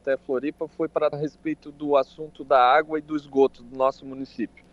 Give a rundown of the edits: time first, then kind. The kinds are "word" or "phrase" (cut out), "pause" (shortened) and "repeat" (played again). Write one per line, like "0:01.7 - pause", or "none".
0:01.1 - word